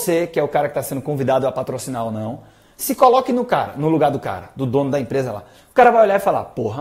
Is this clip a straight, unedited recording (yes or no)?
yes